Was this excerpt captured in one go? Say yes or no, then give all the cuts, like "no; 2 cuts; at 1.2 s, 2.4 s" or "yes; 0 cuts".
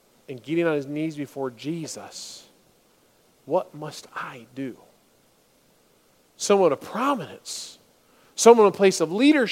yes; 0 cuts